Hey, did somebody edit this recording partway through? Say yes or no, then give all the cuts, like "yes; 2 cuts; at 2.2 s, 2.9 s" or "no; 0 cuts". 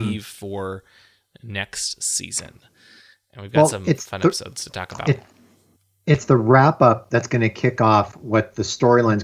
no; 0 cuts